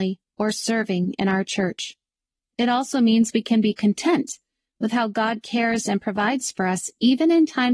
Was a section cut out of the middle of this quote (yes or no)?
no